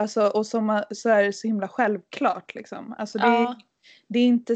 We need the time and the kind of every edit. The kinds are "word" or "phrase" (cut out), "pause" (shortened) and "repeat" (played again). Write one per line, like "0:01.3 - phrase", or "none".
none